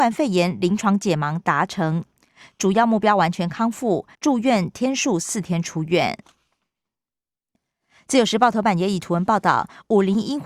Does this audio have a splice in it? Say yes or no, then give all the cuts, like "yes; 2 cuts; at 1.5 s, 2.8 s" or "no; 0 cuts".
yes; 1 cut; at 4.1 s